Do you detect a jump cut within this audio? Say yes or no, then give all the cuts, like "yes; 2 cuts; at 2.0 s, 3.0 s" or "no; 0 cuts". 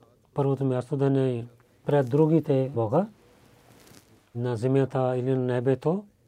yes; 3 cuts; at 1.8 s, 2.7 s, 4.3 s